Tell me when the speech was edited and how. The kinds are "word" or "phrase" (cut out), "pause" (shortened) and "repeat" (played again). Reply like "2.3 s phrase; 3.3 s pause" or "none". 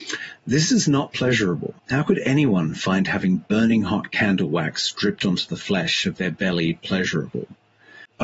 1.8 s pause